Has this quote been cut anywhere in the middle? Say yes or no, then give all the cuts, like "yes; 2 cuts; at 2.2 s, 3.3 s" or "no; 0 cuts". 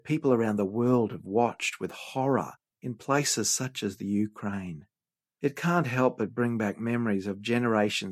no; 0 cuts